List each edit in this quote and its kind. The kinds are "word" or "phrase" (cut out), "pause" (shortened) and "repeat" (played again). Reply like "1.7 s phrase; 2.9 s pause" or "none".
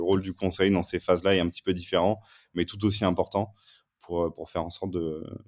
none